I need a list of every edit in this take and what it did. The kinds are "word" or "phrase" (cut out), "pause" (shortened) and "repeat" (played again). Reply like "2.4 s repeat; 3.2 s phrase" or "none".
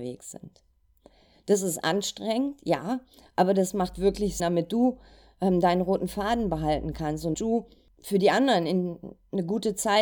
4.4 s word; 7.3 s word